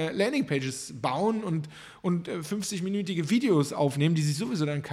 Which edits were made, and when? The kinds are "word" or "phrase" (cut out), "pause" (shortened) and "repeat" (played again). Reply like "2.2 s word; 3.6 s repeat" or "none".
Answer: none